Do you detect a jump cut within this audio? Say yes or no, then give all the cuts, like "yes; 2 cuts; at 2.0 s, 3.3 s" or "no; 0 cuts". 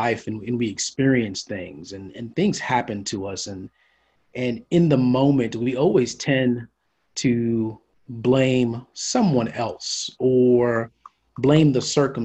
no; 0 cuts